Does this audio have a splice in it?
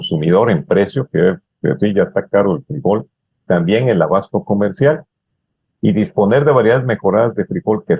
yes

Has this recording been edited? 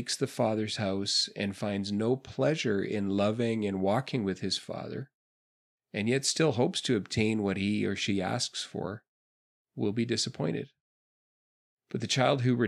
no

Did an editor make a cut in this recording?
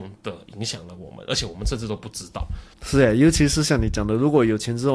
yes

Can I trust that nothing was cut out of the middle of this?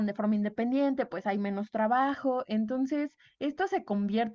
yes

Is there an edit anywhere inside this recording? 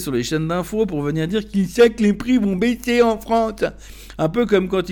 no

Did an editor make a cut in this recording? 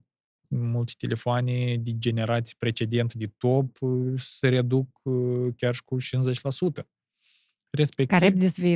no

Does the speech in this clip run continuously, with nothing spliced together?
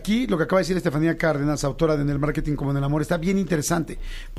yes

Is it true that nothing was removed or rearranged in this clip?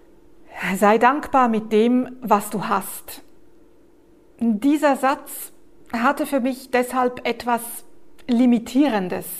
yes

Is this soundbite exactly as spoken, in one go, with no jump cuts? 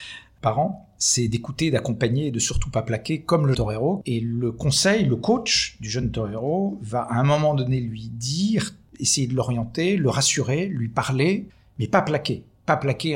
no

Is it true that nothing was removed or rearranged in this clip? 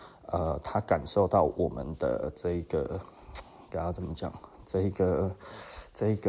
yes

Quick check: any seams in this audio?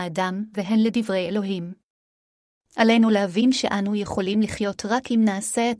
no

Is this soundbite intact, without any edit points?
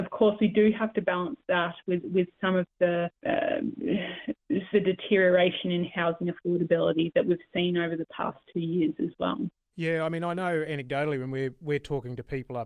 no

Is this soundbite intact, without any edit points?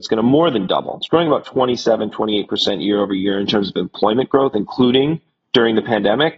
yes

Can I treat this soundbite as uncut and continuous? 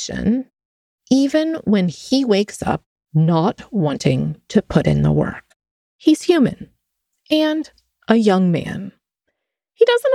yes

